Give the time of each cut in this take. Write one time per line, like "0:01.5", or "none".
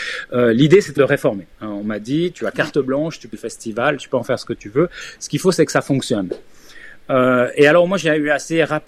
0:01.0
0:01.5
0:03.3